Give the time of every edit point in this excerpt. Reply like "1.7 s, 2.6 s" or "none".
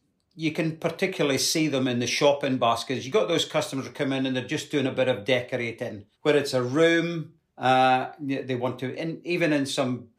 6.1 s, 7.5 s, 8.9 s

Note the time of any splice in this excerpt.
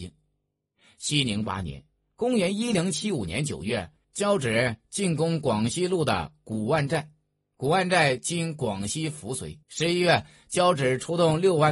9.6 s

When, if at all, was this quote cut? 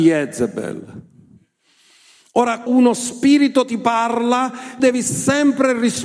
2.7 s, 4.8 s

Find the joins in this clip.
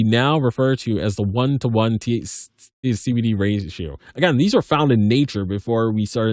2.8 s

